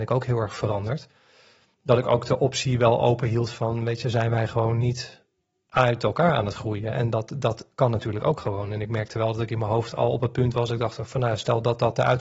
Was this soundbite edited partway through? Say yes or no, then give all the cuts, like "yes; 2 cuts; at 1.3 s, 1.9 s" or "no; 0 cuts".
no; 0 cuts